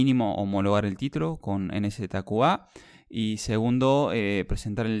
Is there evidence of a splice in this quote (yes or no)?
no